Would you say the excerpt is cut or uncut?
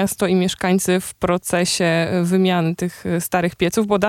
uncut